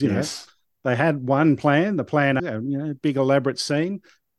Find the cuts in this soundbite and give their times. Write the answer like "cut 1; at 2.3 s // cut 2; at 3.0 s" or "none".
cut 1; at 2.4 s